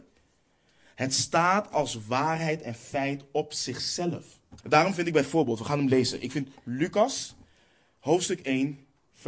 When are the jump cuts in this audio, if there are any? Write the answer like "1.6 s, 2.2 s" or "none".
4.6 s